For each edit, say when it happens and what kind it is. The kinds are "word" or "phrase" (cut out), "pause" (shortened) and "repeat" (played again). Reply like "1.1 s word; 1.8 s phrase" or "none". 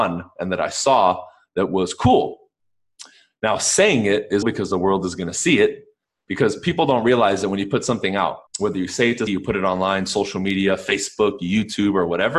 4.4 s word; 8.5 s pause; 9.3 s word